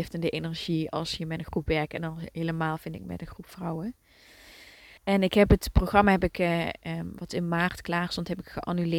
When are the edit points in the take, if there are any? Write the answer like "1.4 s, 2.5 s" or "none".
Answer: 5.0 s